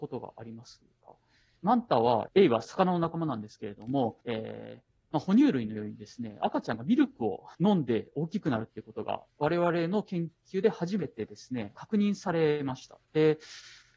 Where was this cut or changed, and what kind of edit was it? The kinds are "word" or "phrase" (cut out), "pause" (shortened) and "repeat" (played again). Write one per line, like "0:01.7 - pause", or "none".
0:04.2 - pause
0:05.0 - pause
0:07.5 - pause